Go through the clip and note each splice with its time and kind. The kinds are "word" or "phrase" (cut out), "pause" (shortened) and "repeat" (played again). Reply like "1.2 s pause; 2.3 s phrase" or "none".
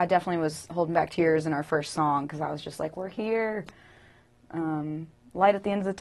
none